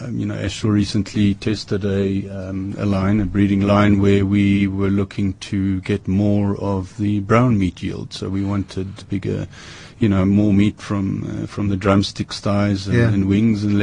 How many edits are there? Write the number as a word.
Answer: one